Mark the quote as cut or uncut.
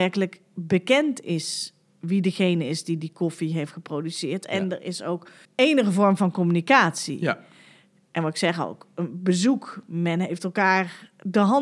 cut